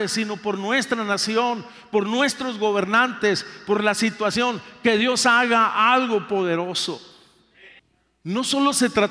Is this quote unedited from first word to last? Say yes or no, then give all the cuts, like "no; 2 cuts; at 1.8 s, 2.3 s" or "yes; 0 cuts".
yes; 0 cuts